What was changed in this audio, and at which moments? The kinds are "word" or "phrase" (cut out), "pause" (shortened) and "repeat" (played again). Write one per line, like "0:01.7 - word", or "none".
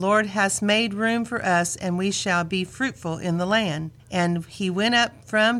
0:04.0 - pause